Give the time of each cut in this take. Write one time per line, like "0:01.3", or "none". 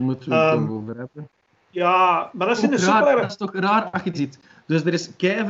0:04.1